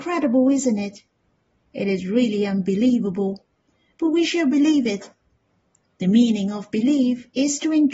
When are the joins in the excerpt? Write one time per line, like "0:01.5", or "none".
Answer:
none